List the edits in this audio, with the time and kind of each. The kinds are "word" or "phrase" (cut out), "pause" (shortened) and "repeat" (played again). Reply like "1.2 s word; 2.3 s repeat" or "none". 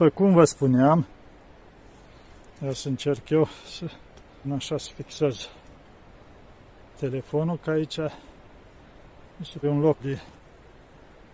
4.4 s word; 9.6 s word; 10.0 s word